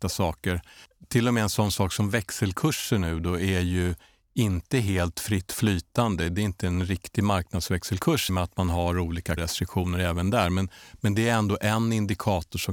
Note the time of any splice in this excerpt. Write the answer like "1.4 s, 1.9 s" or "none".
8.3 s, 9.4 s